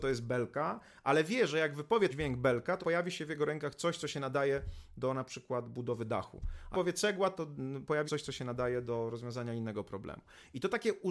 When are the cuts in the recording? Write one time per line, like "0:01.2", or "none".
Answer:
0:02.1
0:02.8
0:06.7
0:08.1